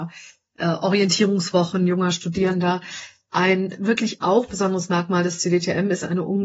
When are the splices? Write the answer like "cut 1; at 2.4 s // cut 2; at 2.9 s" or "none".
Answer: none